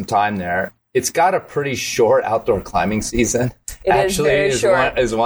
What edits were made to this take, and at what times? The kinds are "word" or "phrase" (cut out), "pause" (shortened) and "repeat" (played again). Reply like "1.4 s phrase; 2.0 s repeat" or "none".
none